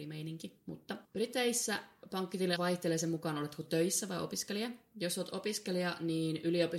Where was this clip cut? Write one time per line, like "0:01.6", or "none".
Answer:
0:01.0
0:02.6